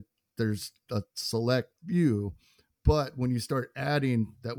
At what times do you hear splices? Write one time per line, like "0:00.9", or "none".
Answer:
0:01.8